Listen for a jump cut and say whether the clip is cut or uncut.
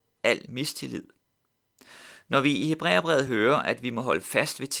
uncut